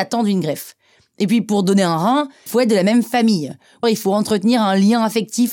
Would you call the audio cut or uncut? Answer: cut